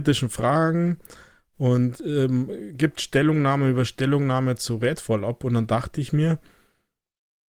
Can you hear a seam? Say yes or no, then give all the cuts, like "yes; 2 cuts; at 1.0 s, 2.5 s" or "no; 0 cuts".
no; 0 cuts